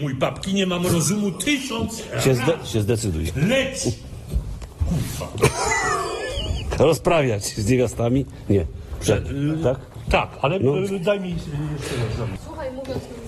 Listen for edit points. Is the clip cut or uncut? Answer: uncut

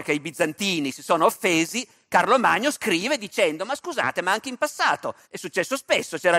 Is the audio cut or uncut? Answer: cut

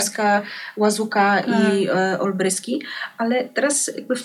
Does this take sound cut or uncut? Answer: uncut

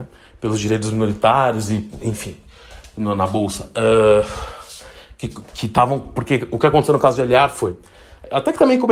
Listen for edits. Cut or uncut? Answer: uncut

